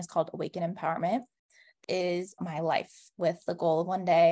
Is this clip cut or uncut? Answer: cut